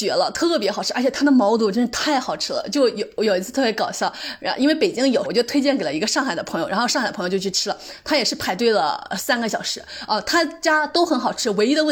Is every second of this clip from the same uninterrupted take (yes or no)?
no